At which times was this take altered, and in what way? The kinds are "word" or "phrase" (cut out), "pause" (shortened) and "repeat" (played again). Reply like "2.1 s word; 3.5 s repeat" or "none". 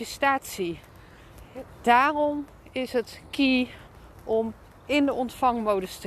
none